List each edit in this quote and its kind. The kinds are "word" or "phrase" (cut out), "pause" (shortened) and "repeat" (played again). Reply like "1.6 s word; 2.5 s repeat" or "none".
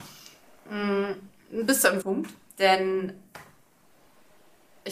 2.0 s word